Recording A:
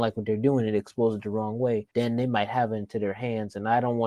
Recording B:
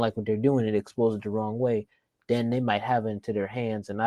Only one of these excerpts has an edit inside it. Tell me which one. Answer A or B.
A